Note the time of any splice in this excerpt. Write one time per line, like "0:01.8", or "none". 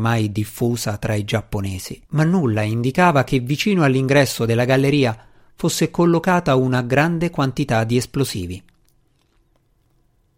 0:02.0

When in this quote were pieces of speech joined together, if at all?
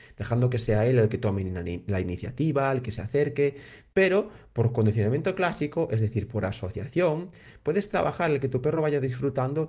none

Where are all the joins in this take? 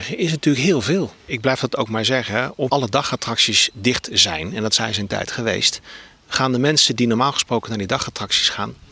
0:02.7

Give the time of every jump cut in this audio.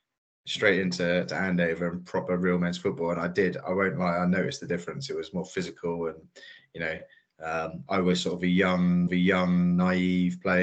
0:09.1

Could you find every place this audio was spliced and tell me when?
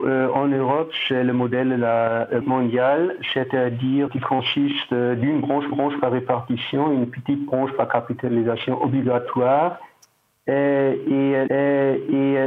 0:02.4
0:04.1
0:05.7
0:11.5

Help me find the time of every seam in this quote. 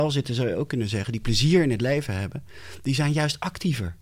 none

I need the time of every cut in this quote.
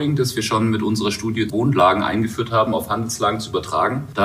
0:01.5

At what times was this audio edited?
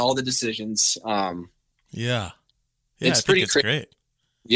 none

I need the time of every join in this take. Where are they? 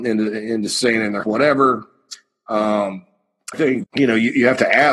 0:01.2
0:03.5
0:03.8

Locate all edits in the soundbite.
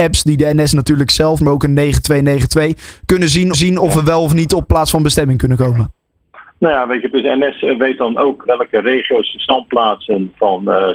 0:01.4
0:03.5
0:08.4

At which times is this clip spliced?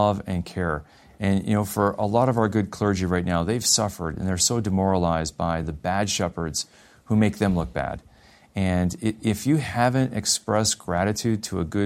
none

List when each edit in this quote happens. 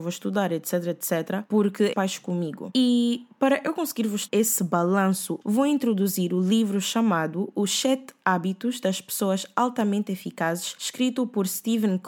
0:01.9
0:04.3
0:05.4

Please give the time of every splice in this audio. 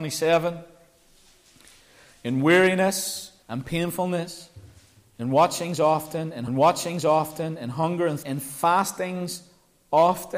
0:03.4
0:06.5
0:08.2

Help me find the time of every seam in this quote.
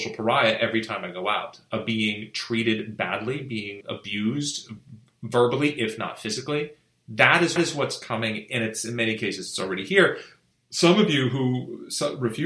0:03.8
0:07.6
0:10.5

